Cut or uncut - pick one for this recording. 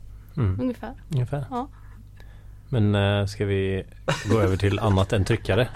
cut